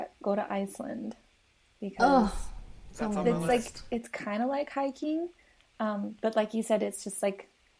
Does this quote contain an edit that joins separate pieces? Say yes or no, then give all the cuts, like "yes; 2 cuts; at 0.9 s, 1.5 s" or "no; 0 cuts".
no; 0 cuts